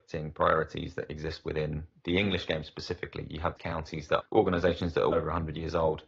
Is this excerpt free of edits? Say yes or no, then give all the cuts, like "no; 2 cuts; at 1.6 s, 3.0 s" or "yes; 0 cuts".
no; 3 cuts; at 3.6 s, 4.2 s, 5.1 s